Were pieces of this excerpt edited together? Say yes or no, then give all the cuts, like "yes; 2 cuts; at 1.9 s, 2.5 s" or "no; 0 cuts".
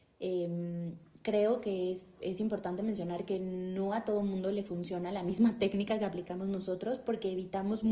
no; 0 cuts